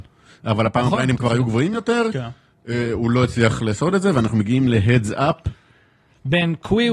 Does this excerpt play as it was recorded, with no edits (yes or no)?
yes